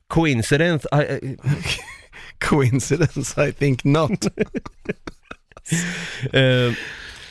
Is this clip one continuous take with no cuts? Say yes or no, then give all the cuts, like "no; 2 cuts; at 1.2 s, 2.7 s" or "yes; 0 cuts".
yes; 0 cuts